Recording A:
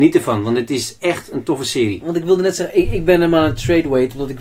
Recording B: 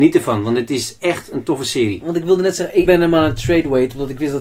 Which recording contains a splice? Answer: B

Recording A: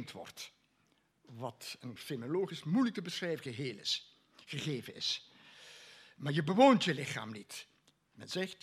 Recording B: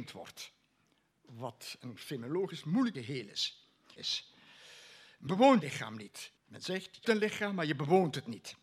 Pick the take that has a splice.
B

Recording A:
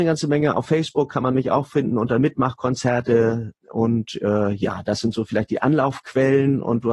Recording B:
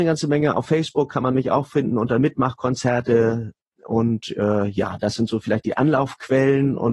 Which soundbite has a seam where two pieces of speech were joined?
A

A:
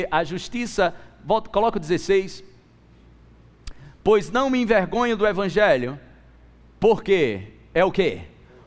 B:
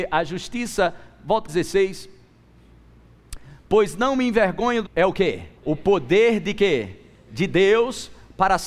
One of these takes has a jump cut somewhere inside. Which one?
B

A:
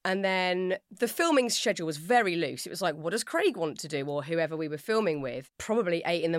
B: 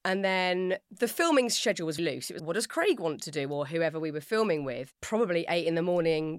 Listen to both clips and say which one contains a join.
B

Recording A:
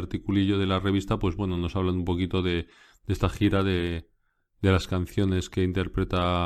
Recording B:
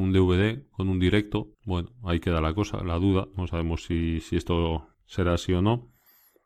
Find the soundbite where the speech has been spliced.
B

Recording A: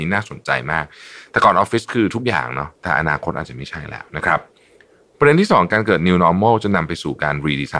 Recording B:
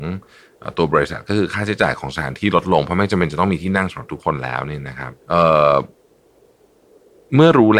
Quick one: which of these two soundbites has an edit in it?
B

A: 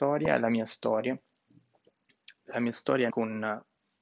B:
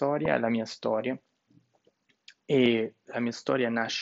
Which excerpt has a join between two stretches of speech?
A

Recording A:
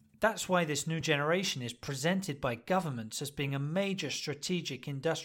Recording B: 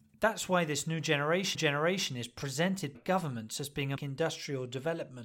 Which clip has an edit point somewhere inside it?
B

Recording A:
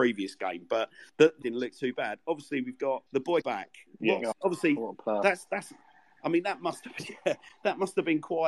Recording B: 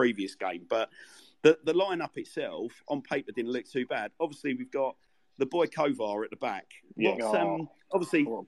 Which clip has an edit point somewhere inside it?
A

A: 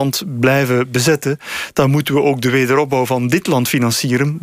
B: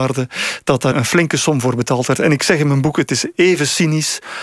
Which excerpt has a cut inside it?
B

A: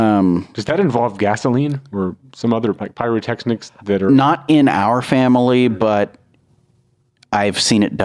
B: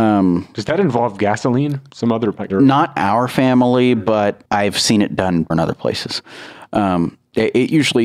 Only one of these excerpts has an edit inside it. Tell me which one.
B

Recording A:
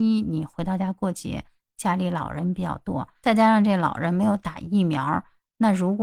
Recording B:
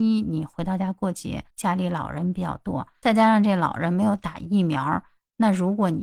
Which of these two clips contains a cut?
B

